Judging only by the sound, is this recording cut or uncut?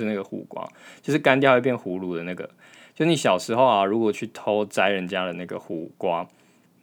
uncut